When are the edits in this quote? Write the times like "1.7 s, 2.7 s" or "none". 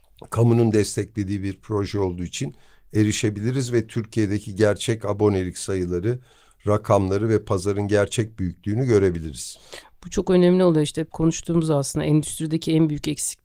none